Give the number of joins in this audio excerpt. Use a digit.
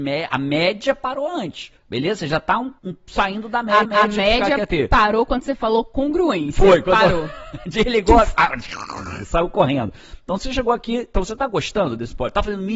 3